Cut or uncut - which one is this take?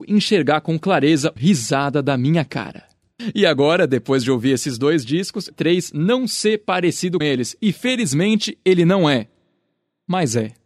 cut